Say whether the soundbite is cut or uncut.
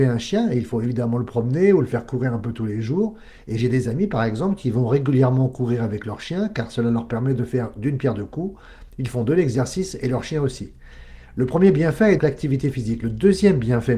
cut